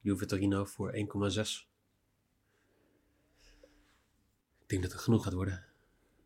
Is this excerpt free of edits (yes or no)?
no